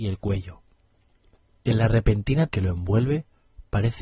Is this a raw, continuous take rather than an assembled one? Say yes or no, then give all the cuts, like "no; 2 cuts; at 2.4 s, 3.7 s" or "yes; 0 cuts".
no; 1 cut; at 2.5 s